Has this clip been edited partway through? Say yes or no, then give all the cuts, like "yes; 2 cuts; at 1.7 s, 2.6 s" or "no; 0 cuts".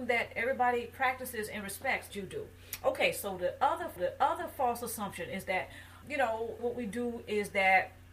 yes; 4 cuts; at 2.1 s, 4.0 s, 6.0 s, 6.6 s